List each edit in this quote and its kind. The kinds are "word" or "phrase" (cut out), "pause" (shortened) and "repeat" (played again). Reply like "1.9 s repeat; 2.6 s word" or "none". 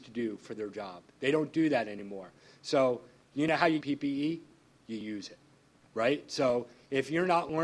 3.8 s phrase

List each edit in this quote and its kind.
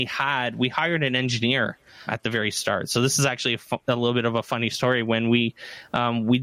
2.1 s word

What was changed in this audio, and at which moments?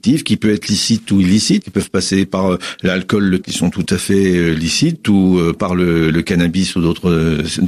1.6 s word; 3.4 s word; 6.1 s word

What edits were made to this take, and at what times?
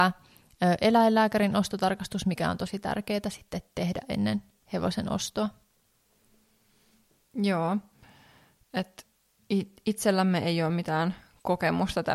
none

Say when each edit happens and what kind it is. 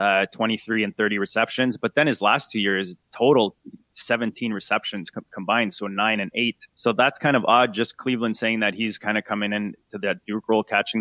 5.3 s word; 6.7 s pause

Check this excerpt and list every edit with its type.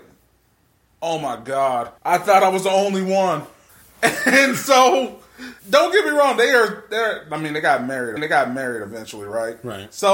2.0 s pause; 3.7 s pause; 5.6 s pause; 8.2 s repeat

